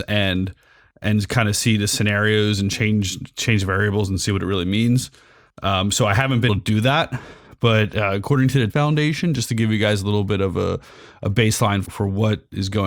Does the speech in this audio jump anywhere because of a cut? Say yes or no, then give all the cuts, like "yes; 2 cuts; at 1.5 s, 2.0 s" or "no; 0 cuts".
yes; 3 cuts; at 6.5 s, 8.7 s, 11.8 s